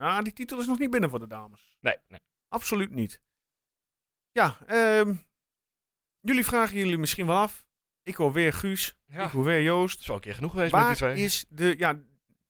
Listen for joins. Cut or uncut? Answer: uncut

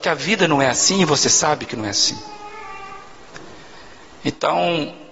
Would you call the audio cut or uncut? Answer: uncut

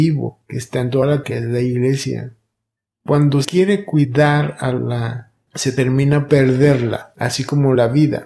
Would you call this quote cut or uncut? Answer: cut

